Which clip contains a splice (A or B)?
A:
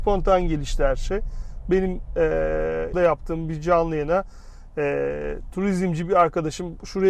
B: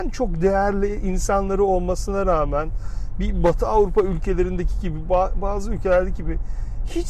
A